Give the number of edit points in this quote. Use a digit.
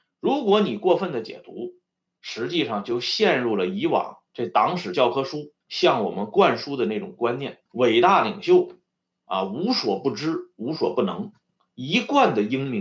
3